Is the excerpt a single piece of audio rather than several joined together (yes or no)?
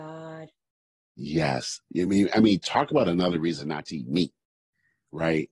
yes